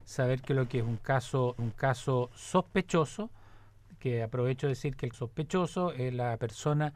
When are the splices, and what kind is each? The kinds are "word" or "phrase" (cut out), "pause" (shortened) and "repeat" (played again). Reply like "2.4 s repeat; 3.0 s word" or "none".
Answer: 1.6 s repeat; 5.1 s word